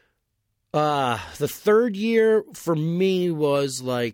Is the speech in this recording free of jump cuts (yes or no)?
yes